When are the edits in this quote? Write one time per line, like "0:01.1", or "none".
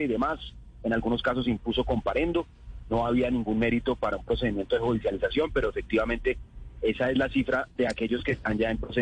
none